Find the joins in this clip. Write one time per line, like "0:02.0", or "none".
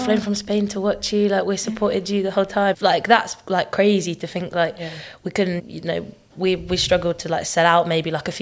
0:02.7
0:05.6